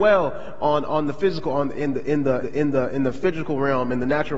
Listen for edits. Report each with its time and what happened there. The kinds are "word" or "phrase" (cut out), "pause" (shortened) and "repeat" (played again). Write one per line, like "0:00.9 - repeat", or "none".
0:02.4 - repeat

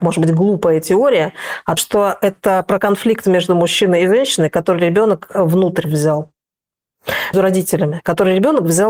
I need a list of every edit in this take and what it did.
0:01.8 - word
0:07.3 - word

